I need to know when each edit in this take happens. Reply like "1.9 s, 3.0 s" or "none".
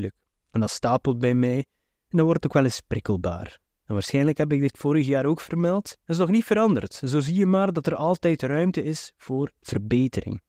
6.0 s